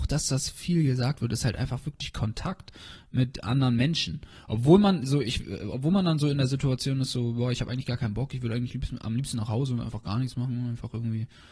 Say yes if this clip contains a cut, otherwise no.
no